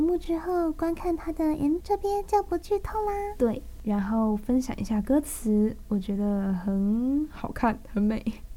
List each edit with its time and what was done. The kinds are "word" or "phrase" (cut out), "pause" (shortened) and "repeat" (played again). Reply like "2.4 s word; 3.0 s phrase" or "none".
1.8 s word